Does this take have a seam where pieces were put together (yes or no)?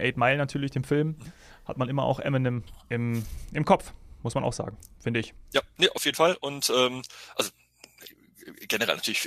no